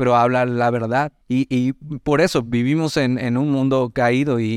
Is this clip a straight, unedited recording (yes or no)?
no